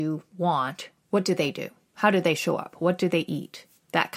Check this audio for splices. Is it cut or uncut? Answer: cut